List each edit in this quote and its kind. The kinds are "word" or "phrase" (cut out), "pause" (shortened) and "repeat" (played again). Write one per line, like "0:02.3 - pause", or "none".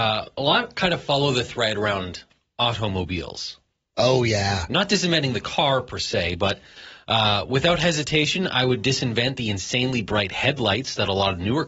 none